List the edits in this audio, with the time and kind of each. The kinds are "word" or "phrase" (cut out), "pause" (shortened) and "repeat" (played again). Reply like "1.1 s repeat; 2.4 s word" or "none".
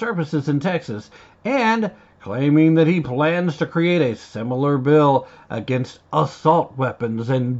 none